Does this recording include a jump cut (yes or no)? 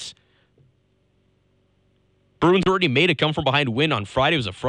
no